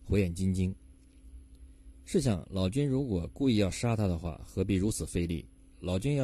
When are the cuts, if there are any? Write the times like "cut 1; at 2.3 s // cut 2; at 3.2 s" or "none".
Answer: none

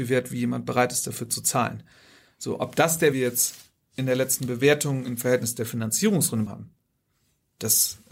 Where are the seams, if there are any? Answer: cut 1; at 3.1 s // cut 2; at 6.5 s

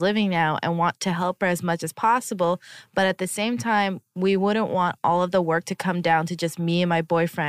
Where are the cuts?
none

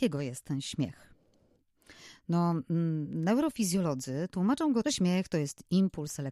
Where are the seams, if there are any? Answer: cut 1; at 4.8 s

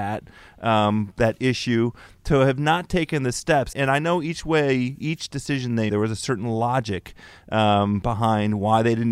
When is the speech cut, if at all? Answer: cut 1; at 3.7 s // cut 2; at 5.9 s

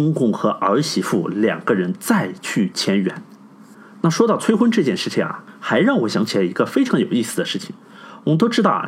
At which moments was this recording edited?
cut 1; at 3.7 s

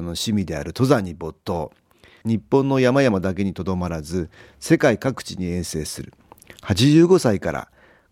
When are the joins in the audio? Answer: none

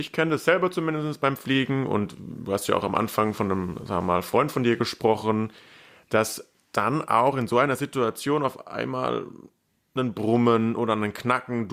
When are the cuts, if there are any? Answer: none

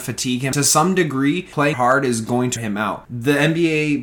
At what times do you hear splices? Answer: cut 1; at 1.7 s // cut 2; at 2.6 s

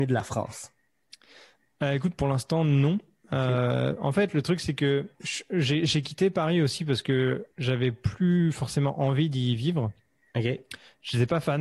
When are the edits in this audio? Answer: cut 1; at 5.2 s // cut 2; at 7.5 s

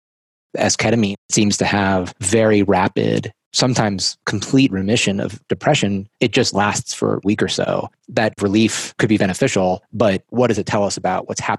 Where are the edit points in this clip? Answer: cut 1; at 6.1 s // cut 2; at 8.0 s

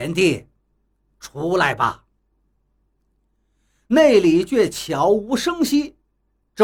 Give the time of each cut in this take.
none

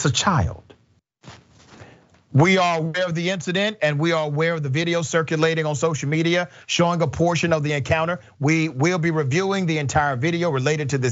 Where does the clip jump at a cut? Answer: none

